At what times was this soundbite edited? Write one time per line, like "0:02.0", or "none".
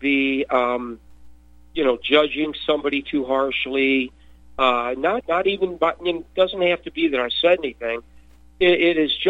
0:05.2